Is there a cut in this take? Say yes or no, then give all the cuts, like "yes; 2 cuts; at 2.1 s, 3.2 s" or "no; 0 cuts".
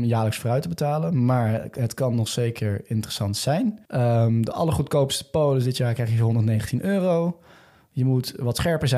yes; 1 cut; at 3.8 s